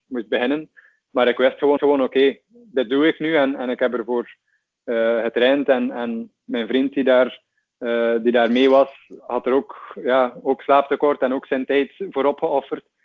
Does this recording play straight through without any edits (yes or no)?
no